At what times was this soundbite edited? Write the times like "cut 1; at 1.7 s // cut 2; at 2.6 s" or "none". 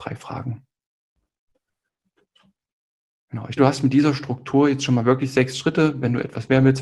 cut 1; at 3.6 s